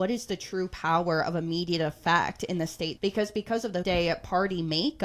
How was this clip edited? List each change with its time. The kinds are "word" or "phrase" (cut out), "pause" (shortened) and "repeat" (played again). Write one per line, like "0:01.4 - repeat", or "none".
0:03.0 - word
0:03.8 - word

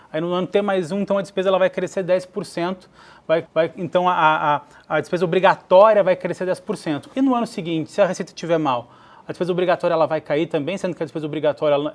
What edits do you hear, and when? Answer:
0:03.5 - repeat

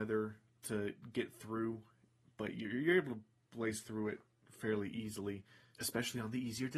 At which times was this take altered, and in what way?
none

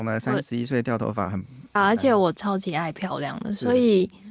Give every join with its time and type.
0:01.8 - phrase

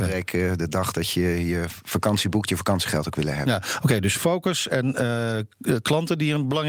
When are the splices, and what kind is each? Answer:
none

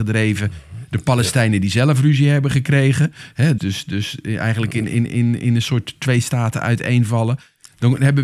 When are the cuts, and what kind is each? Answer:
0:03.6 - word

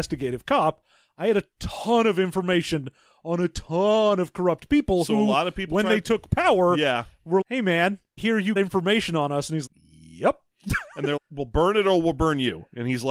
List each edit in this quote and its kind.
0:07.4 - word
0:08.2 - word
0:08.6 - word
0:09.7 - word
0:11.2 - word

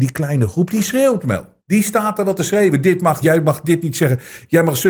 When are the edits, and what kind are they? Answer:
0:01.6 - pause
0:03.2 - word

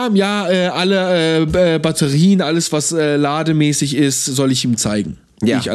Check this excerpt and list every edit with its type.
none

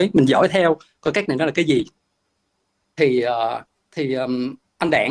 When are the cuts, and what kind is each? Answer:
0:01.3 - word
0:03.7 - pause

